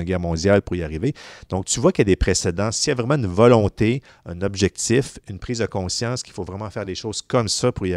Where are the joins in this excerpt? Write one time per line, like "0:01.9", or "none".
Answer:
none